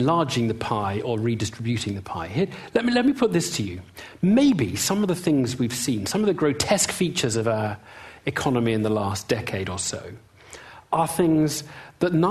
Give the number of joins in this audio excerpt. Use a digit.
0